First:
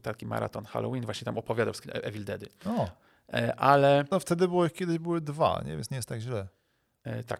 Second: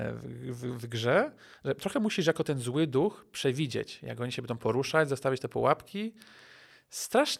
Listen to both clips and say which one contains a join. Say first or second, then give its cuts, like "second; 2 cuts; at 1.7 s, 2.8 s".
first; 1 cut; at 1.8 s